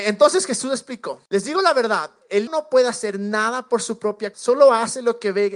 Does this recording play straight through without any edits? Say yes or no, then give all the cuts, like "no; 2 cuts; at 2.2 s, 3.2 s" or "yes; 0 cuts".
no; 3 cuts; at 1.3 s, 2.5 s, 4.3 s